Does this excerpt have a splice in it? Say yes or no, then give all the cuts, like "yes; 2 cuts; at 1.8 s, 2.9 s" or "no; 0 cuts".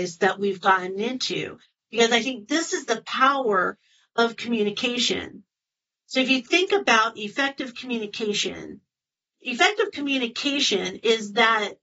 no; 0 cuts